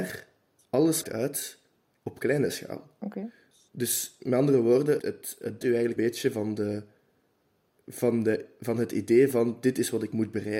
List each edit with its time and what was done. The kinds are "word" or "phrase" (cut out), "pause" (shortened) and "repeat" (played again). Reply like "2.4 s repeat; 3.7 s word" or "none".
1.0 s word; 5.0 s word; 5.6 s word; 6.0 s word